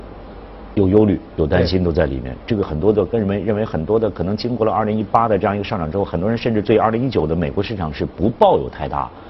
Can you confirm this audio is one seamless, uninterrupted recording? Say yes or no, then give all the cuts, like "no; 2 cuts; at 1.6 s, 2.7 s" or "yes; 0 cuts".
yes; 0 cuts